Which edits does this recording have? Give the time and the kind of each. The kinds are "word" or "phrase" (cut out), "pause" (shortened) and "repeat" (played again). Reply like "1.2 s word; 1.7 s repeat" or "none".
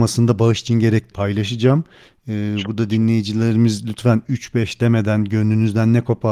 1.1 s phrase